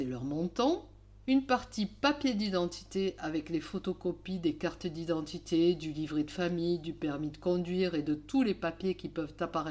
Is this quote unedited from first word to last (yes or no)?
yes